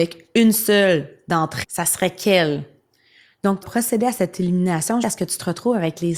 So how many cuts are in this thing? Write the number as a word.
three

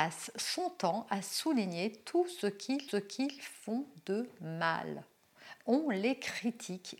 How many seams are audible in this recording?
one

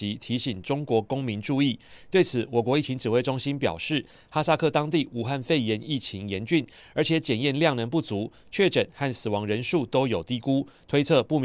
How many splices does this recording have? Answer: zero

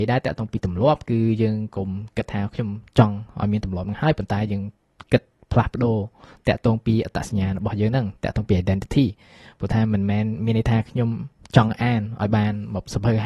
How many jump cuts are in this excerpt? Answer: zero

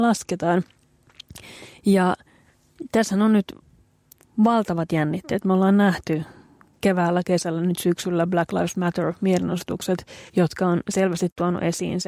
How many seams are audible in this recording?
one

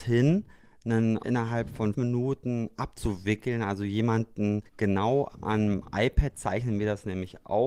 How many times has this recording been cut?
three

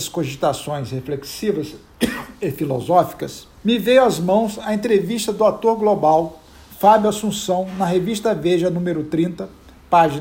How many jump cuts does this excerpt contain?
one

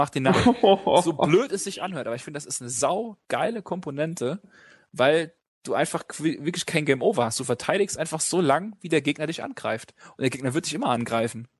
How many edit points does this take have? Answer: zero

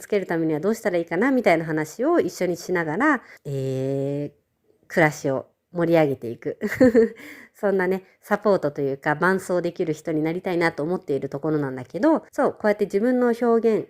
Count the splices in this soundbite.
three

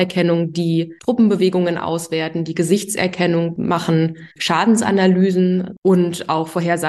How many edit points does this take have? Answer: one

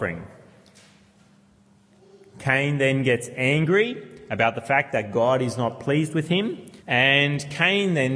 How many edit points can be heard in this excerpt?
one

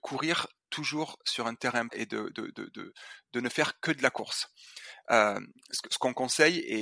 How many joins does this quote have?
one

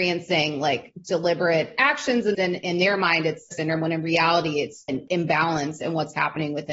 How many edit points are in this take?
three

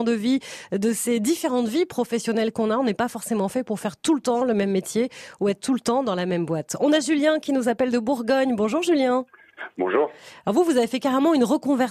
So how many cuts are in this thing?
zero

